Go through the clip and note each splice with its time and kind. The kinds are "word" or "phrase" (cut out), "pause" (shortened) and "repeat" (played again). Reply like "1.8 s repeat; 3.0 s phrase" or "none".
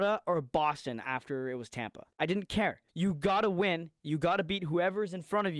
2.1 s pause; 2.9 s pause